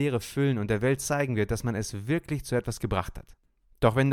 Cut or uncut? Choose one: uncut